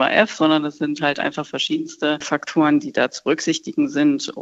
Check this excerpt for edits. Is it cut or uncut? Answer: uncut